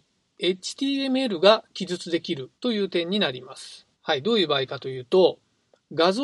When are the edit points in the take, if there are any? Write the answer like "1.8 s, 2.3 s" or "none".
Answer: 2.6 s, 3.9 s